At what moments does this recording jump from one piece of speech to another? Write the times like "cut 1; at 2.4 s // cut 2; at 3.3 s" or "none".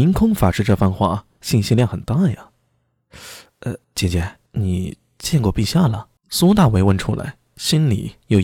cut 1; at 3.8 s // cut 2; at 4.5 s // cut 3; at 6.2 s